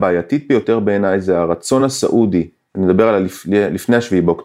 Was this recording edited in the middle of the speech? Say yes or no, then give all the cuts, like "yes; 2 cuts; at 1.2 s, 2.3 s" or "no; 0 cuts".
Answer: no; 0 cuts